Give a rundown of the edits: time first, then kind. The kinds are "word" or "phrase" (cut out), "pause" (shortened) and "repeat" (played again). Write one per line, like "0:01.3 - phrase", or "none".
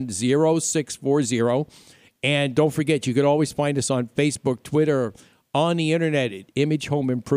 none